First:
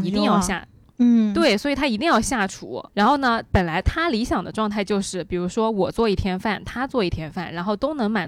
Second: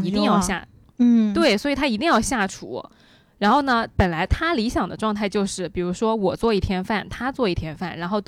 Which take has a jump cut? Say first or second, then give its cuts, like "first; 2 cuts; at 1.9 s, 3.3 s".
first; 1 cut; at 2.9 s